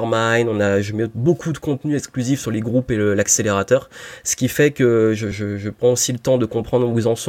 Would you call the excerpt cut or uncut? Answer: uncut